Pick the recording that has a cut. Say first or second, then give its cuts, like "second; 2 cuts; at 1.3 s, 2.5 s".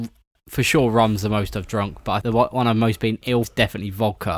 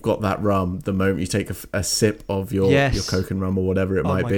first; 2 cuts; at 2.2 s, 3.4 s